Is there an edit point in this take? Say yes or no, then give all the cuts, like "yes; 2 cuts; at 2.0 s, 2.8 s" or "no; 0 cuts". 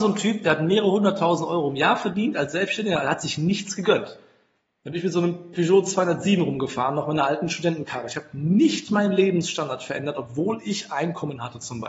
no; 0 cuts